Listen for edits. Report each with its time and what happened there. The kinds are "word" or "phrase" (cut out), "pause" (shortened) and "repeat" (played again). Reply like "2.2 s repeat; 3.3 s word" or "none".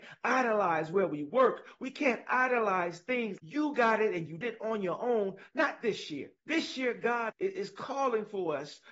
3.4 s word; 4.4 s word; 6.4 s pause; 7.3 s word

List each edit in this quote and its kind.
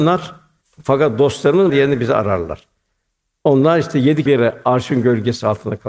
1.7 s word; 4.3 s word

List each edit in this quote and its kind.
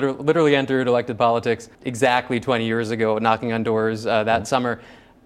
1.7 s pause

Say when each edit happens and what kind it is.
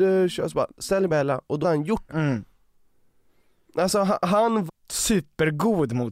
1.1 s word; 1.6 s word; 2.1 s word; 4.7 s word

